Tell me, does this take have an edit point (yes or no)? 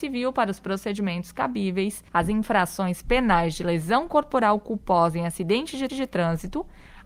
yes